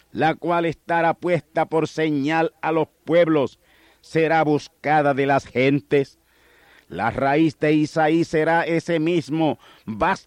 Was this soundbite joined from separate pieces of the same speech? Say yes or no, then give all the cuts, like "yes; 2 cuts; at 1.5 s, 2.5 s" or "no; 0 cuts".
no; 0 cuts